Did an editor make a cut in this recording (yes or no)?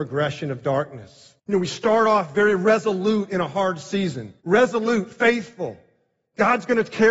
yes